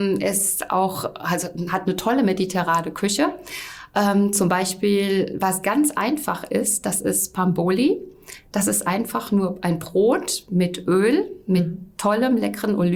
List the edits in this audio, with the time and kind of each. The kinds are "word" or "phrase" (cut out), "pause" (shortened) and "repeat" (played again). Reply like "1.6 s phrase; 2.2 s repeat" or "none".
none